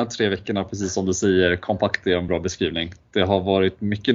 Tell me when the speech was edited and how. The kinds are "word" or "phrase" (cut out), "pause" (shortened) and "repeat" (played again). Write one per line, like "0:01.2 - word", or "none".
0:02.3 - word